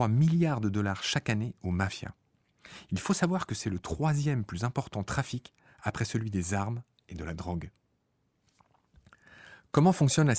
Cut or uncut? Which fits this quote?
uncut